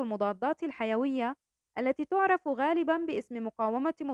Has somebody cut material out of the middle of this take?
no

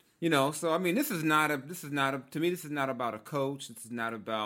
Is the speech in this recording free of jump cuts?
yes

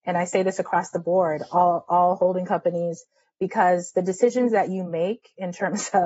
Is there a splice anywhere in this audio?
no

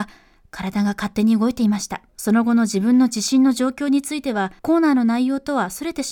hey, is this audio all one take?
no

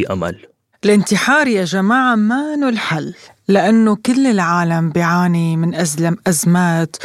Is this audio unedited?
yes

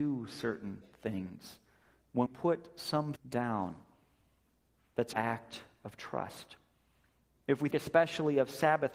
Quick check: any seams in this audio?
yes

